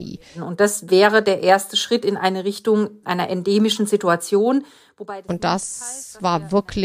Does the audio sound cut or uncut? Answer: uncut